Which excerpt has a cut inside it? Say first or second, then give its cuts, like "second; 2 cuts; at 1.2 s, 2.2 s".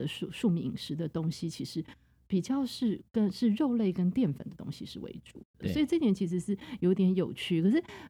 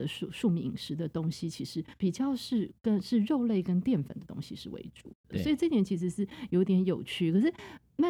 second; 1 cut; at 2.0 s